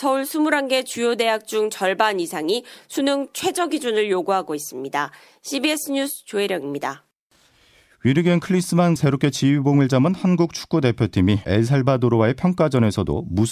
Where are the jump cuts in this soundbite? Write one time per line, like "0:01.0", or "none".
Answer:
0:09.0
0:11.4